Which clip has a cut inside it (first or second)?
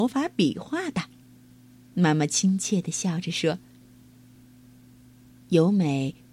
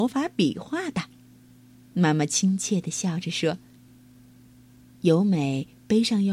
second